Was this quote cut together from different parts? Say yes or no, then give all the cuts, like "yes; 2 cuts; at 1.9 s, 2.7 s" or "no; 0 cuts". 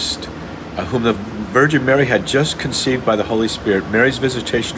no; 0 cuts